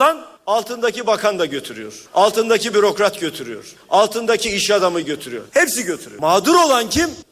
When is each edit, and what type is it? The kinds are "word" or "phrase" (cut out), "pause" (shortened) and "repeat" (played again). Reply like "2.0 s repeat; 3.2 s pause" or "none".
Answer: 5.5 s pause